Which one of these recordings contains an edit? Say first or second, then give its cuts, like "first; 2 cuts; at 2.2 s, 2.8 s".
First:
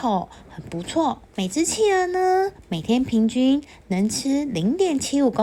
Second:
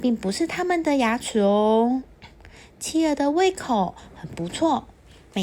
first; 1 cut; at 1.3 s